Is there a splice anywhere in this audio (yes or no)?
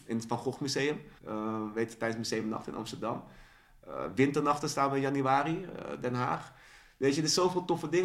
yes